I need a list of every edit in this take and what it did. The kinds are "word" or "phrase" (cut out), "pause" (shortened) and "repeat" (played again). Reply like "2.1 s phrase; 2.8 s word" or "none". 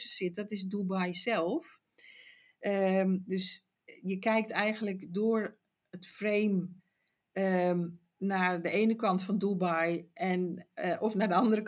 none